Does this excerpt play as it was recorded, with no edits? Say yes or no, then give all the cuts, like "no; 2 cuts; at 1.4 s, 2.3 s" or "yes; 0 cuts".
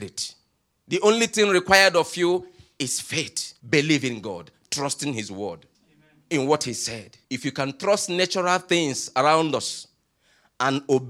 no; 3 cuts; at 3.6 s, 5.7 s, 7.2 s